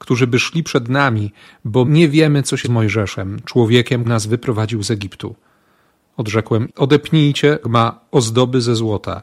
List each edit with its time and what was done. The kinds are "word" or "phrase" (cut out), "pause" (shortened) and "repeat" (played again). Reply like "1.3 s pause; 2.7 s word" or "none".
1.8 s word; 2.6 s word; 4.0 s word; 6.7 s word; 7.6 s word